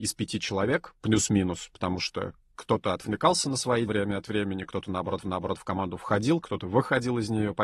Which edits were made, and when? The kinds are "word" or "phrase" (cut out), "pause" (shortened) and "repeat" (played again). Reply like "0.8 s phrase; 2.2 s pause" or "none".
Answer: 3.9 s word; 5.2 s repeat